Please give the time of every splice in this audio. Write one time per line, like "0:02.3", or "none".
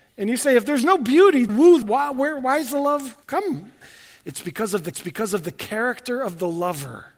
0:01.5
0:01.8
0:03.2
0:04.9